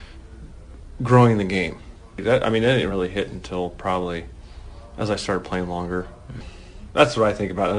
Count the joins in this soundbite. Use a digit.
0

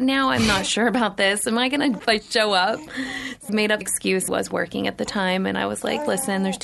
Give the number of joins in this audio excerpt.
4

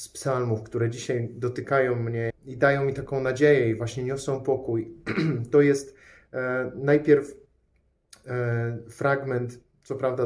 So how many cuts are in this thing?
1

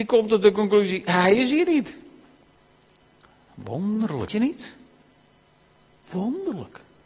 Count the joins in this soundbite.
2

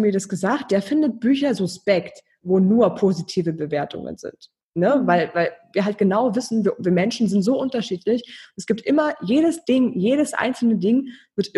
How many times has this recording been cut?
0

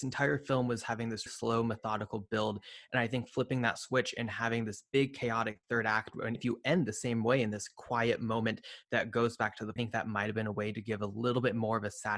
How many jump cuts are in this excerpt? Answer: 4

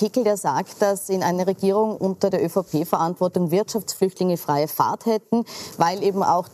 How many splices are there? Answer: 0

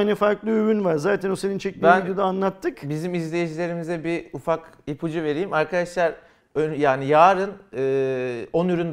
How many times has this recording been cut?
0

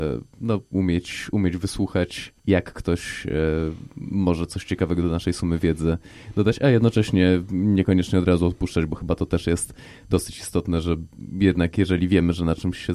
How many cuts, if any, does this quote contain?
1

